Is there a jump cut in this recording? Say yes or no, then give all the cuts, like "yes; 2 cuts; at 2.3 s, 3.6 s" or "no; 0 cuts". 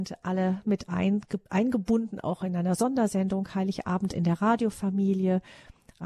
yes; 1 cut; at 1.5 s